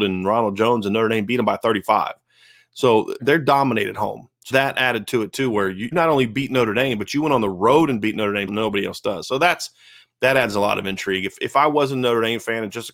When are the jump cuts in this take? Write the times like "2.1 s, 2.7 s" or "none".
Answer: 3.2 s, 4.5 s, 5.9 s, 8.5 s